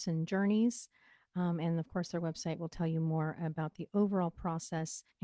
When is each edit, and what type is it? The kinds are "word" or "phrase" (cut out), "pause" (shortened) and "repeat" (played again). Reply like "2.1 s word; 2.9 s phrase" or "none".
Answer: none